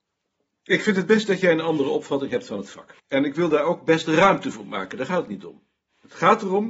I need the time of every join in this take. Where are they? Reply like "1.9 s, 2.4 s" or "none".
3.0 s

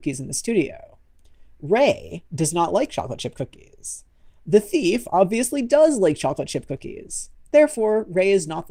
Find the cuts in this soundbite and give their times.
none

